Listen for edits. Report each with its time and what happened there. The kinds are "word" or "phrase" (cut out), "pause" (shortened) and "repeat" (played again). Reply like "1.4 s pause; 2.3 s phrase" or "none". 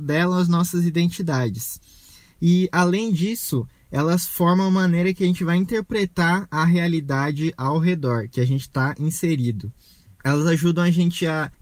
none